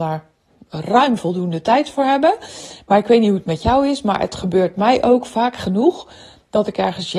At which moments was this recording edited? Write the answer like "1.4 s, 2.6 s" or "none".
none